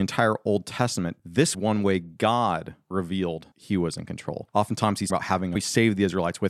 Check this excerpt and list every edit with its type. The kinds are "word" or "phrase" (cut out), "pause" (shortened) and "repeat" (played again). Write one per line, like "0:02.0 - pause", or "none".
0:01.5 - word
0:03.5 - word
0:05.1 - word
0:05.5 - phrase